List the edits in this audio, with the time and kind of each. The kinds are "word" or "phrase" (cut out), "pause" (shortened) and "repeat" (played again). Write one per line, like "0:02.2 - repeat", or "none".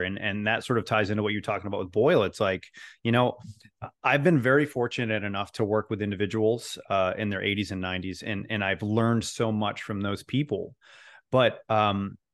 none